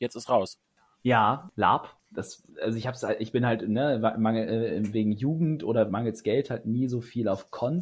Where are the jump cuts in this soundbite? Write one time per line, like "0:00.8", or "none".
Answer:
0:02.5